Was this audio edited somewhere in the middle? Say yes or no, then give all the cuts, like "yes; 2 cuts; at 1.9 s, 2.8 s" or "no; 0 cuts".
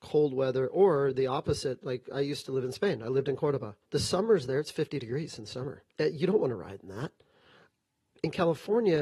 yes; 2 cuts; at 3.8 s, 5.9 s